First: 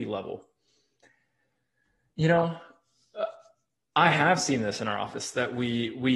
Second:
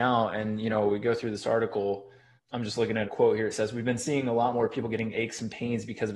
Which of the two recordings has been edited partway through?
second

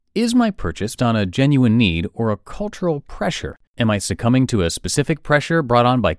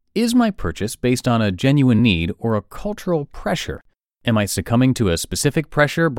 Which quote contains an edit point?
first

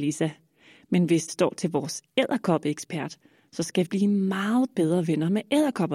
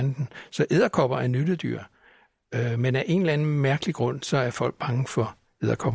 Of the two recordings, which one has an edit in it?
first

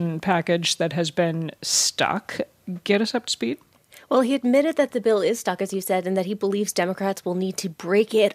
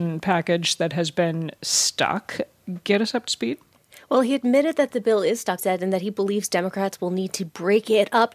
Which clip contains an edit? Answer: second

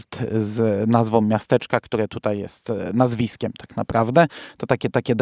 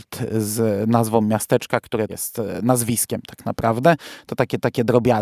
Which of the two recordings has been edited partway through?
second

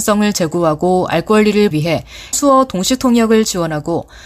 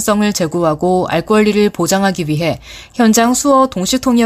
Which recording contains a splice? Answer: first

